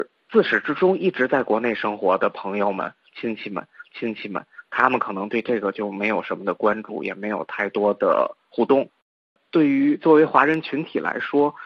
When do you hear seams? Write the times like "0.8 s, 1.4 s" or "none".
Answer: 3.8 s